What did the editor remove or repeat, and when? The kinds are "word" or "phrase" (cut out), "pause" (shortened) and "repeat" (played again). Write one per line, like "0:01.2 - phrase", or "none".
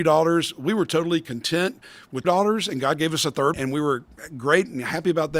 0:02.2 - word
0:03.5 - word